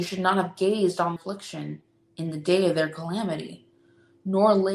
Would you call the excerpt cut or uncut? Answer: cut